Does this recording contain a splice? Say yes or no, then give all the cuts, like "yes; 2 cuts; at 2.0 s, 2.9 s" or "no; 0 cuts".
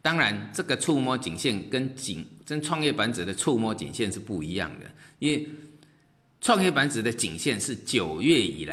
no; 0 cuts